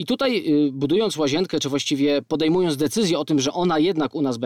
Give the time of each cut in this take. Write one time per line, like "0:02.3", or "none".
none

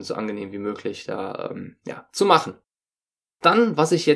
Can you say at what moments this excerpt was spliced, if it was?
none

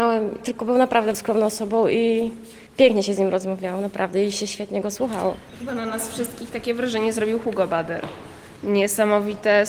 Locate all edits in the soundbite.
0:01.1
0:02.7

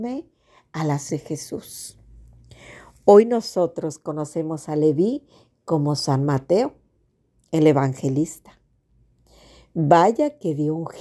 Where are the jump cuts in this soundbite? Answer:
0:01.1

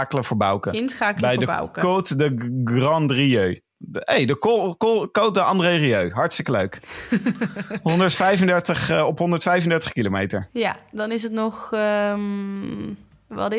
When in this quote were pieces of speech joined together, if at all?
none

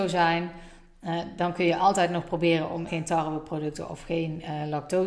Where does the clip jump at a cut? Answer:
0:02.9

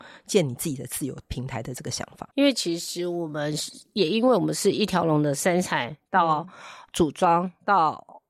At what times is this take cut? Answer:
0:02.3

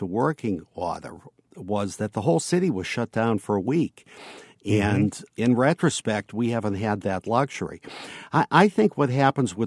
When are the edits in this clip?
none

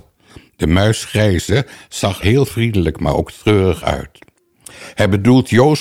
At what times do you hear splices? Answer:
0:02.2

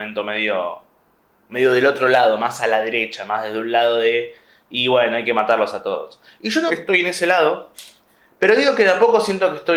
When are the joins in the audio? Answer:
0:06.7

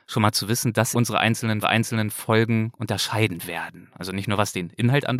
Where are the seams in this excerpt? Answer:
0:00.9
0:01.6

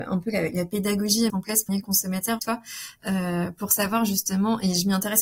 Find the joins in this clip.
0:01.3
0:01.7
0:02.4

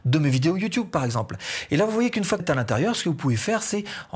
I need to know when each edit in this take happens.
0:02.4

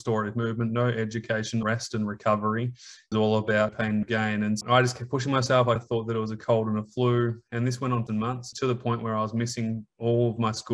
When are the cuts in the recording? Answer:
0:01.6
0:03.1
0:03.7
0:04.0
0:04.6
0:05.8
0:08.1
0:08.5

